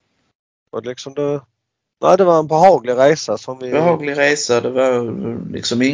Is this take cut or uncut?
uncut